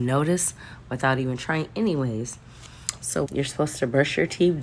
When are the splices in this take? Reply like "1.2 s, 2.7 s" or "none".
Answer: 3.3 s

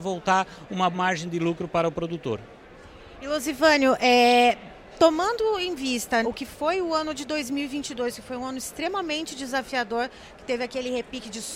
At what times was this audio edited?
0.9 s, 6.2 s

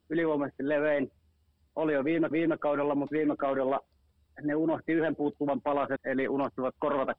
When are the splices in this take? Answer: 2.3 s, 6.0 s

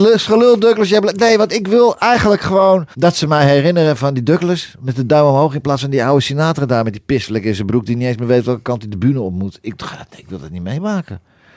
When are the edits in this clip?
2.9 s

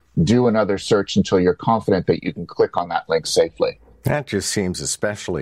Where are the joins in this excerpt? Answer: none

